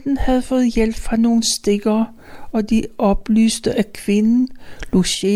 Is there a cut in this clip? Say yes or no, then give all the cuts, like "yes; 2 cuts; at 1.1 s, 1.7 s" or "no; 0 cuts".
no; 0 cuts